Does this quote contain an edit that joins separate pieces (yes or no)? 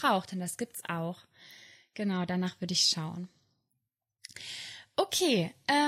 no